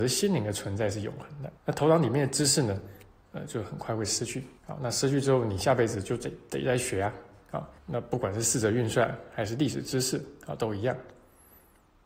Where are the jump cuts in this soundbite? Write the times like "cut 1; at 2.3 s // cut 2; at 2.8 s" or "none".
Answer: cut 1; at 1.6 s // cut 2; at 4.6 s // cut 3; at 7.8 s

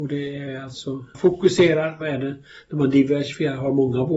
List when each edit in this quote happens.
cut 1; at 1.1 s // cut 2; at 2.0 s

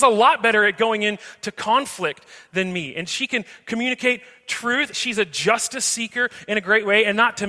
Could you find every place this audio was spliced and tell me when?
cut 1; at 4.9 s

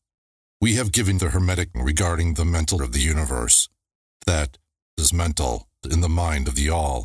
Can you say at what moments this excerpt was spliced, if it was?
cut 1; at 1.2 s // cut 2; at 1.7 s // cut 3; at 2.8 s // cut 4; at 4.2 s // cut 5; at 5.0 s // cut 6; at 5.8 s

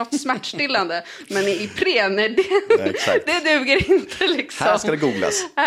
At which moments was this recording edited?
none

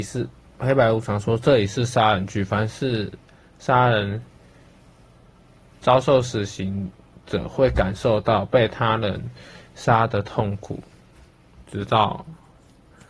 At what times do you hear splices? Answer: none

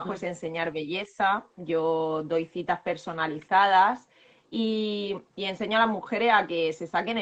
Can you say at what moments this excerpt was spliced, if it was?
none

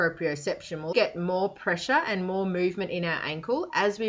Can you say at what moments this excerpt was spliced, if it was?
cut 1; at 0.9 s

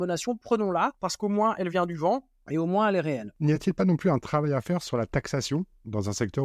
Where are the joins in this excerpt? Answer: none

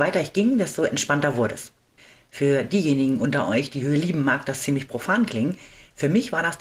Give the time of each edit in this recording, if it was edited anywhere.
none

